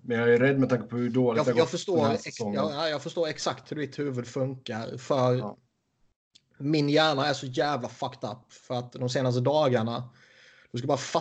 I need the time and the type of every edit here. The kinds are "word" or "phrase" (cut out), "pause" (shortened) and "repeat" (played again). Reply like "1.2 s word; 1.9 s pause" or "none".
none